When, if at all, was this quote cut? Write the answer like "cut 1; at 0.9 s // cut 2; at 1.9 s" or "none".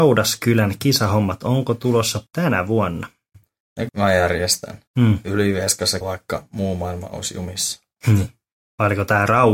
cut 1; at 2.3 s // cut 2; at 3.9 s // cut 3; at 4.9 s // cut 4; at 6.0 s